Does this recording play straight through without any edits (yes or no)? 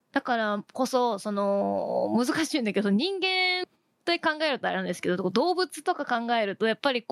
yes